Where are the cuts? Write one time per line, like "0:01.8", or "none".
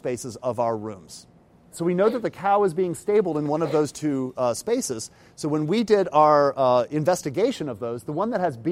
none